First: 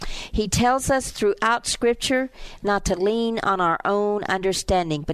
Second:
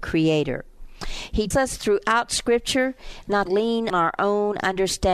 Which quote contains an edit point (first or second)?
second